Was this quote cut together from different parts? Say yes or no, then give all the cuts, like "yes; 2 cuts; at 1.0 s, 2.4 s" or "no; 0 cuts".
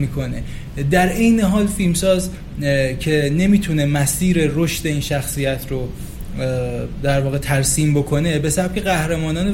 no; 0 cuts